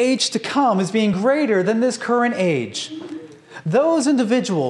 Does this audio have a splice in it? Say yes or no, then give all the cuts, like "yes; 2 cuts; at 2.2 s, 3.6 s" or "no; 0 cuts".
no; 0 cuts